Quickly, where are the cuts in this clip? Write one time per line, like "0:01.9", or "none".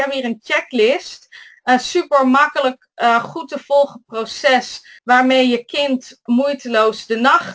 0:05.0
0:06.3